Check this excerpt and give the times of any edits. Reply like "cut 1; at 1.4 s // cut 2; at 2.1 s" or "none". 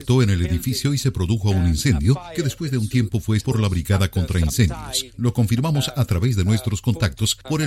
cut 1; at 3.4 s